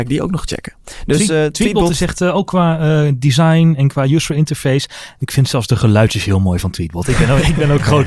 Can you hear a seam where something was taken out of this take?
no; 0 cuts

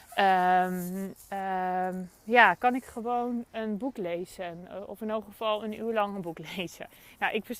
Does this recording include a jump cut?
no; 0 cuts

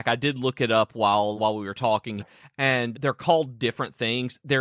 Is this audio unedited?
no; 3 cuts; at 1.4 s, 2.2 s, 2.9 s

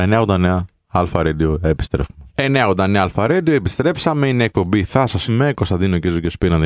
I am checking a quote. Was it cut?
yes; 1 cut; at 5.3 s

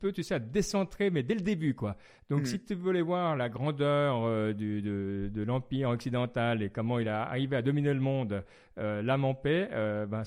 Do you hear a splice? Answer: no; 0 cuts

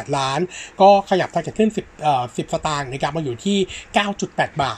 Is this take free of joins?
no; 1 cut; at 1.5 s

